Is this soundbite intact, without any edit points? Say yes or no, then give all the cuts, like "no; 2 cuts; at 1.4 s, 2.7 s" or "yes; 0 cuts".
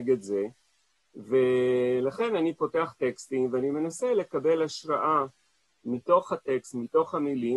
yes; 0 cuts